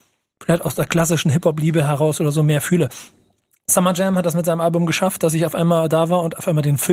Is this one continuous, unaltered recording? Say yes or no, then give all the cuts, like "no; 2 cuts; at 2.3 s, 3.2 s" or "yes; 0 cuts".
yes; 0 cuts